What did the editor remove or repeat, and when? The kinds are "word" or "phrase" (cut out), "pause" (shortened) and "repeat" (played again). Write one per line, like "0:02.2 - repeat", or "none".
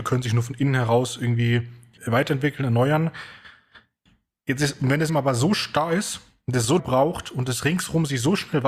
0:02.0 - word
0:05.1 - word
0:06.8 - word